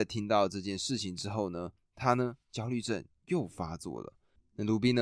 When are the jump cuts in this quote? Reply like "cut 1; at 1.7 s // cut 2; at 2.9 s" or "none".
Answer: cut 1; at 2.4 s